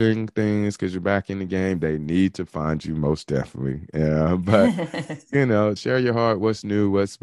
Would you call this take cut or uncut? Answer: cut